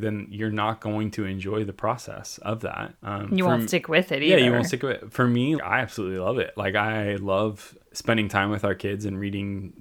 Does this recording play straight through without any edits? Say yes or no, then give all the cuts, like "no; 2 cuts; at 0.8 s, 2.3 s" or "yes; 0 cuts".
no; 3 cuts; at 2.9 s, 5.6 s, 7.8 s